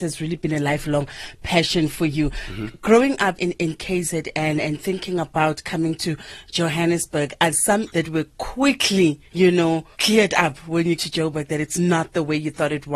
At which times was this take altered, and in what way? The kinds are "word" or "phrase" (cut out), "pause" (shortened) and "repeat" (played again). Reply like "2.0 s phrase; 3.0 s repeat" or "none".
3.4 s word; 7.5 s word; 7.9 s word; 9.3 s pause; 9.9 s pause; 11.0 s word